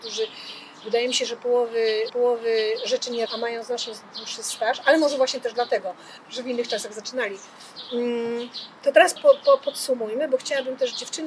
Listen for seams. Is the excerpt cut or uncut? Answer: cut